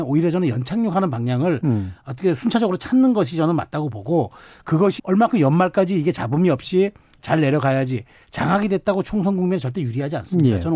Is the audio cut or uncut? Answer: cut